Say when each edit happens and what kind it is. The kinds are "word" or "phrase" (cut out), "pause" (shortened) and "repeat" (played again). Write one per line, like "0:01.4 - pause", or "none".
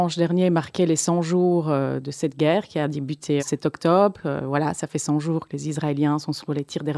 0:03.4 - word